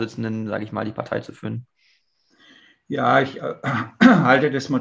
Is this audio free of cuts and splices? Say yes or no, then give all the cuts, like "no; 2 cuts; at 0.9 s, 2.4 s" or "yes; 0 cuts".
yes; 0 cuts